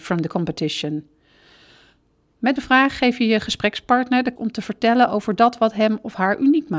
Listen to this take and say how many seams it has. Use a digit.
2